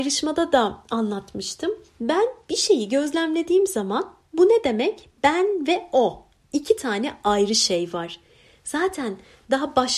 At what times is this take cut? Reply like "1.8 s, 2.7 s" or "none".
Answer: none